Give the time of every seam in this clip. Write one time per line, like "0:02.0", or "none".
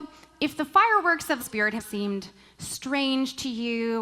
0:01.4
0:01.8